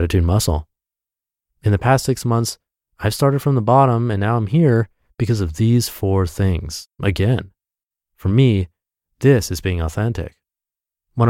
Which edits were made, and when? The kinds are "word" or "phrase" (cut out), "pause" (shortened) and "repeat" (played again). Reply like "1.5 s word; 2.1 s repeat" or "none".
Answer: none